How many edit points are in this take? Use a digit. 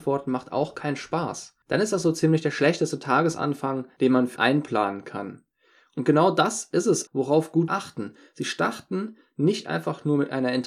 3